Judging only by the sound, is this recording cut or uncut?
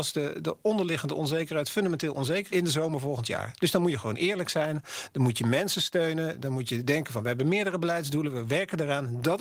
cut